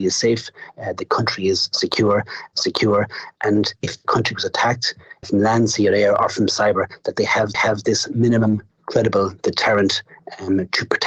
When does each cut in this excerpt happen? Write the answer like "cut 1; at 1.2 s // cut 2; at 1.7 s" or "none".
cut 1; at 2.5 s // cut 2; at 5.2 s // cut 3; at 7.5 s